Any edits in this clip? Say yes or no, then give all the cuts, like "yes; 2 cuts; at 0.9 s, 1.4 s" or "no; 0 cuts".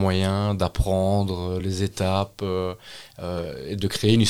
no; 0 cuts